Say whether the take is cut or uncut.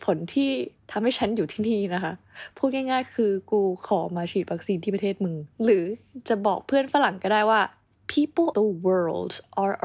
cut